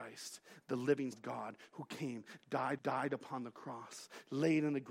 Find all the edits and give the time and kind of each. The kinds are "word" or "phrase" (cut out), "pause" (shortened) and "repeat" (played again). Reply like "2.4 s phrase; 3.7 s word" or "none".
1.1 s word; 2.8 s repeat